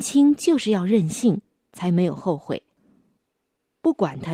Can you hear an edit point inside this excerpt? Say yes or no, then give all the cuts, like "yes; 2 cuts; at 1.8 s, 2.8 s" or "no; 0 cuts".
no; 0 cuts